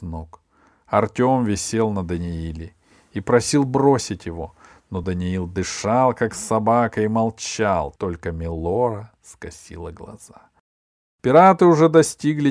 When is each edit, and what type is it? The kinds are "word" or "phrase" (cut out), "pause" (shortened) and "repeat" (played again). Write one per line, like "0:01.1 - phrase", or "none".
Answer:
none